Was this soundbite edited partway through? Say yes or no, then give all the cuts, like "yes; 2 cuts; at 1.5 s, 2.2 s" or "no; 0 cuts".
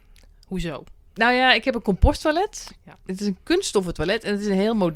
yes; 1 cut; at 1.1 s